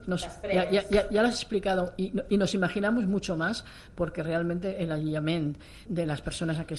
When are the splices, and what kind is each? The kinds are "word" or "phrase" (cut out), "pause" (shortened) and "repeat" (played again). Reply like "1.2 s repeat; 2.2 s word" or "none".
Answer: 5.9 s word